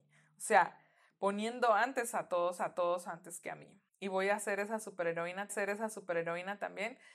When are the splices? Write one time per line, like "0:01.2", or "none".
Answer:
0:02.6
0:03.9
0:05.5